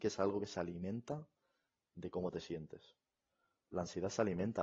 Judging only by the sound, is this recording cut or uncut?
uncut